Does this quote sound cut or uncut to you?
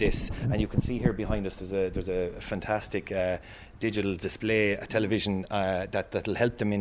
uncut